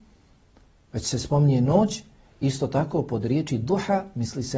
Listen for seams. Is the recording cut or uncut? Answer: uncut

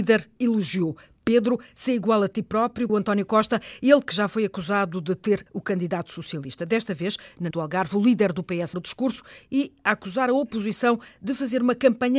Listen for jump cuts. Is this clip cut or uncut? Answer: cut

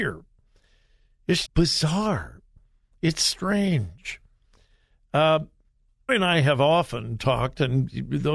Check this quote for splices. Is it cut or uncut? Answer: cut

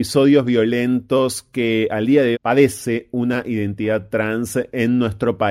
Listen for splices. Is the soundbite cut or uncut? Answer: cut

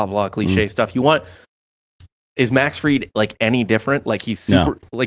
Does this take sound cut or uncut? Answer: uncut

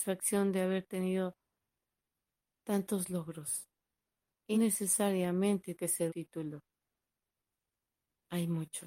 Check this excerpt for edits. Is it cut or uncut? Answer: cut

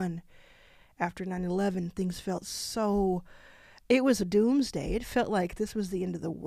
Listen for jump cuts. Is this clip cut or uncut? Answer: uncut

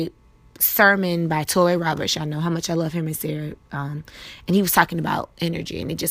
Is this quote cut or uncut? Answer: cut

